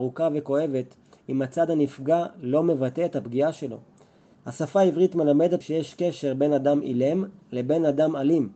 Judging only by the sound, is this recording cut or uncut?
cut